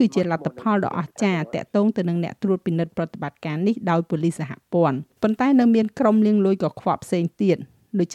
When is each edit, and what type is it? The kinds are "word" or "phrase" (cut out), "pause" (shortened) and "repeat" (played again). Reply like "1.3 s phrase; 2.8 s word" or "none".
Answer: 5.1 s pause